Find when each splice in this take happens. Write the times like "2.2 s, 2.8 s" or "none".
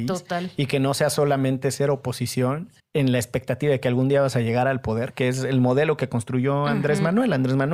2.8 s